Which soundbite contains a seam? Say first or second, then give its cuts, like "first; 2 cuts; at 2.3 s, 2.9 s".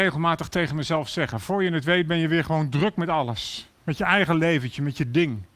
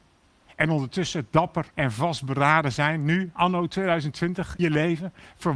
second; 2 cuts; at 1.7 s, 4.6 s